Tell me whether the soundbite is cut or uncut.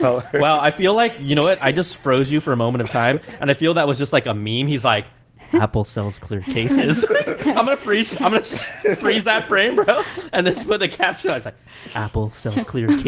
uncut